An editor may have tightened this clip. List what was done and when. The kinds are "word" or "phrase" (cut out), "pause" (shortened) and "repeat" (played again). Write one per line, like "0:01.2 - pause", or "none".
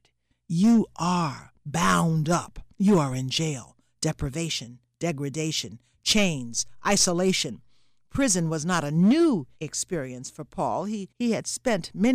0:02.7 - pause
0:09.5 - pause
0:11.1 - pause